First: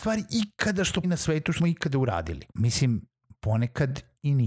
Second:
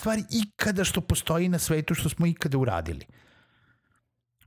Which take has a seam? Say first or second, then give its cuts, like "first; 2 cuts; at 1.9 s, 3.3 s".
first; 3 cuts; at 1.0 s, 1.6 s, 2.5 s